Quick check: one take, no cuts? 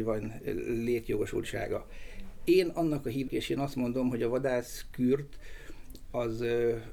no; 1 cut; at 3.3 s

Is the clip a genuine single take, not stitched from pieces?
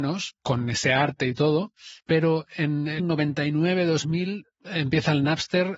no; 3 cuts; at 2.0 s, 3.0 s, 4.5 s

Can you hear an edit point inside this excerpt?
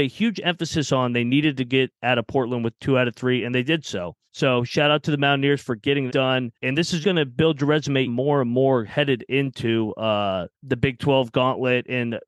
yes; 6 cuts; at 4.3 s, 6.1 s, 6.5 s, 7.0 s, 8.1 s, 10.5 s

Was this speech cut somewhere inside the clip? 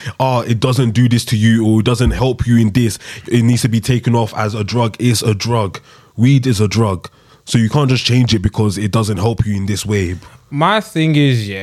no; 0 cuts

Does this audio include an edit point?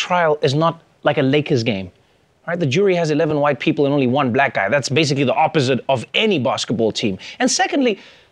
no; 0 cuts

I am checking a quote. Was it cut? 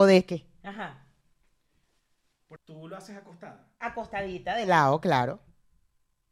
yes; 1 cut; at 2.6 s

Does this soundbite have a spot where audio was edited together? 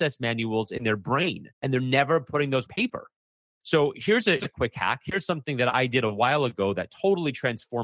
yes; 3 cuts; at 1.5 s, 2.7 s, 4.4 s

